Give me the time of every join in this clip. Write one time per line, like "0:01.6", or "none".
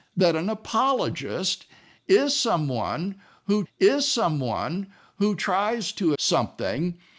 0:03.7
0:06.1